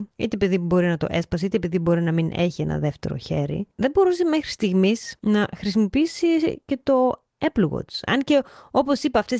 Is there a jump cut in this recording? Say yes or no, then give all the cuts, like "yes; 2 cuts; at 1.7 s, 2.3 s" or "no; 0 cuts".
yes; 1 cut; at 3.7 s